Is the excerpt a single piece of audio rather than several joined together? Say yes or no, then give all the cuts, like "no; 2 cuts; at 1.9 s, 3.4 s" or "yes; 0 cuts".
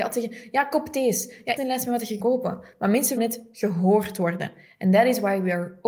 no; 3 cuts; at 1.6 s, 2.2 s, 3.2 s